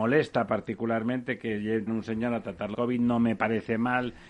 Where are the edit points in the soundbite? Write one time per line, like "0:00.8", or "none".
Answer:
0:01.9
0:02.7